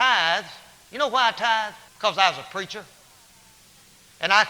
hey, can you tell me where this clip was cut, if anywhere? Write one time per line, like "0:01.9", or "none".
0:01.9